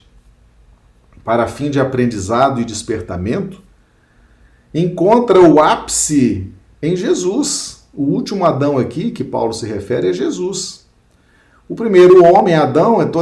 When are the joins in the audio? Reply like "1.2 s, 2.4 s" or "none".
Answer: none